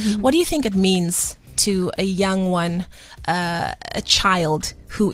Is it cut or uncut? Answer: uncut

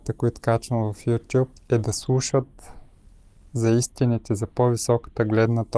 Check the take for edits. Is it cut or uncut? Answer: cut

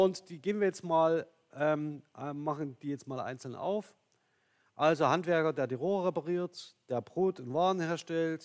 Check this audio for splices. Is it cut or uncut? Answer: uncut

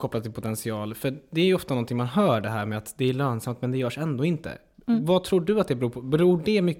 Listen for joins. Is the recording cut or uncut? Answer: uncut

